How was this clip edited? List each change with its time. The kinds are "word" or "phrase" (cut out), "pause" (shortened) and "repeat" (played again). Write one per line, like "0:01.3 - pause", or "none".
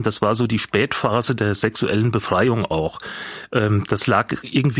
none

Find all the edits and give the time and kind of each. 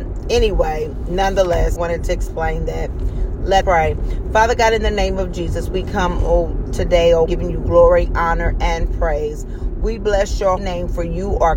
0:01.8 - word
0:03.6 - word
0:07.3 - word
0:10.6 - word

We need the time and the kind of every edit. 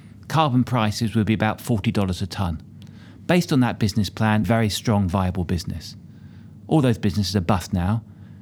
0:04.4 - phrase

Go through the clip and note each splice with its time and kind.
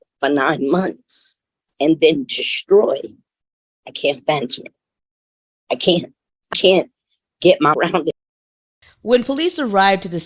0:03.4 - pause
0:06.5 - word
0:07.7 - word

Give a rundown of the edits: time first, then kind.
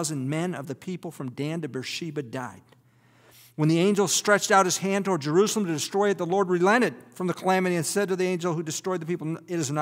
none

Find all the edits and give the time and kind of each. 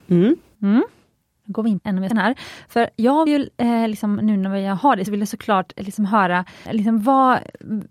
0:01.8 - word
0:02.1 - word
0:03.3 - word
0:05.1 - word
0:06.6 - word

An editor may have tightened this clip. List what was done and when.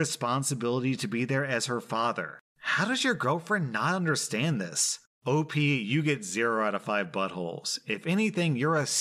none

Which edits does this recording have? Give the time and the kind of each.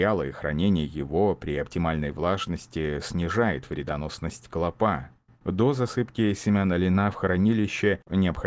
none

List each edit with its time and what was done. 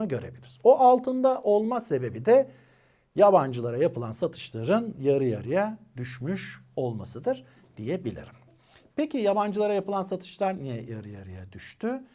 none

